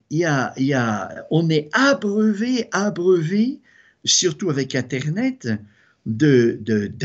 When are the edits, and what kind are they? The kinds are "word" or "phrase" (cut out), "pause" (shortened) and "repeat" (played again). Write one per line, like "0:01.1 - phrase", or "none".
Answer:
none

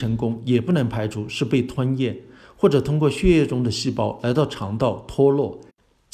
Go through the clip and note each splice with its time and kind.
none

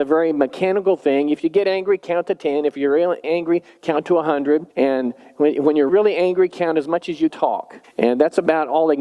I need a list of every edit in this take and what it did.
0:03.2 - word
0:04.7 - pause
0:05.9 - word
0:07.3 - phrase
0:07.8 - pause

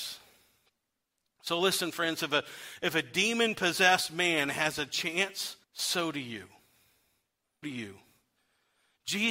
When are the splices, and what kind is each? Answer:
0:05.6 - pause
0:07.6 - word

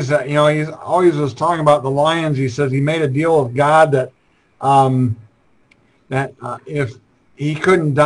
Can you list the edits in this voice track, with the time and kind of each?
none

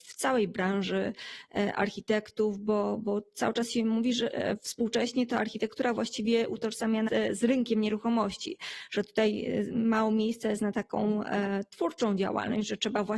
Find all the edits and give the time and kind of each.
0:07.1 - word

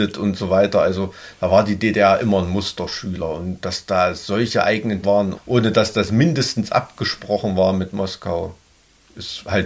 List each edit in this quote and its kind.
0:05.0 - word
0:05.3 - word

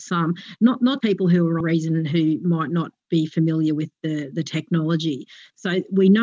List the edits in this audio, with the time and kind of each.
0:01.0 - word
0:01.6 - phrase

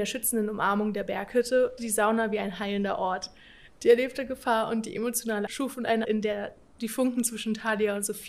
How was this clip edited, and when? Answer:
0:01.8 - word
0:05.5 - word
0:06.0 - word

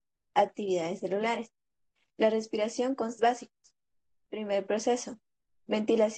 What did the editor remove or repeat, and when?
0:03.2 - phrase

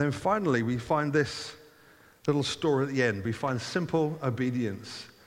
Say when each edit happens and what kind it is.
none

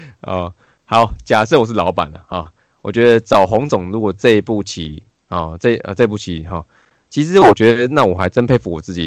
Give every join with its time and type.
none

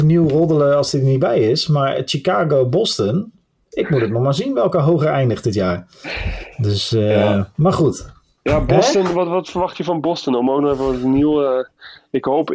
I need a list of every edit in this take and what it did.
none

